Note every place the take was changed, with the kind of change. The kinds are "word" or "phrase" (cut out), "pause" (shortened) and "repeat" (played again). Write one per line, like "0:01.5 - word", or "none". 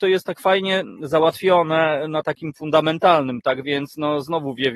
0:02.5 - word